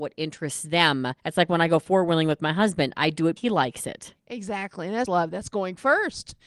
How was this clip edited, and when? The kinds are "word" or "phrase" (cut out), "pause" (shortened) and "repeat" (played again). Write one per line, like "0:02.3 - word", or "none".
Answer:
0:01.2 - pause
0:03.4 - word
0:05.1 - word

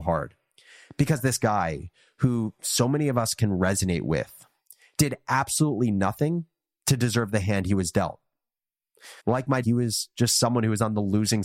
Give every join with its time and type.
0:09.2 - pause
0:09.6 - word

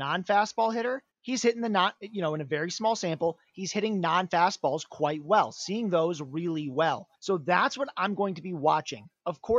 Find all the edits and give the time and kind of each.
0:01.1 - pause
0:07.1 - pause

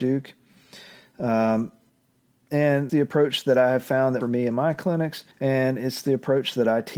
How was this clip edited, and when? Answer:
0:02.9 - word
0:04.2 - phrase
0:05.3 - pause

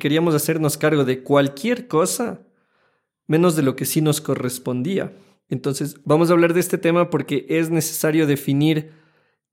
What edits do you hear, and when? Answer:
none

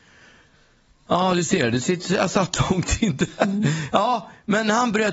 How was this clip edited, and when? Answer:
none

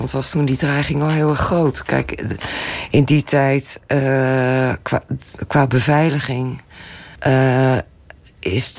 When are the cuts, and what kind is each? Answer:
0:07.2 - pause

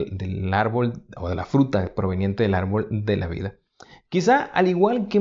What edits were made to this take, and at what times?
none

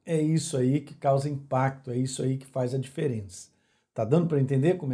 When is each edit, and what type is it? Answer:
none

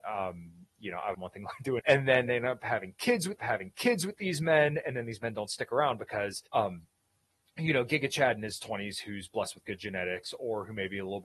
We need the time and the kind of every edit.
0:01.1 - phrase
0:01.8 - word
0:03.4 - repeat
0:06.5 - pause

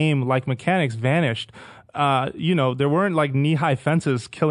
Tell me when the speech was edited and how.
none

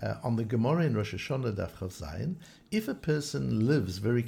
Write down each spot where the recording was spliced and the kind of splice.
none

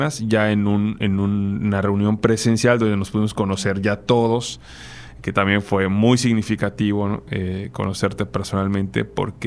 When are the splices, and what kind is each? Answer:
none

